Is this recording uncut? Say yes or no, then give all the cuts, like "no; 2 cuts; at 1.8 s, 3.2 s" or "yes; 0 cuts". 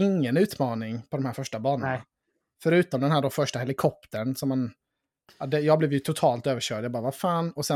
yes; 0 cuts